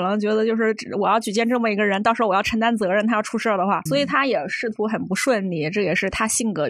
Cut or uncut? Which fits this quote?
cut